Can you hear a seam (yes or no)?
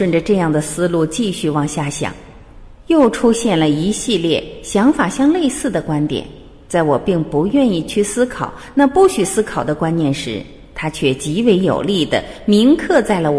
no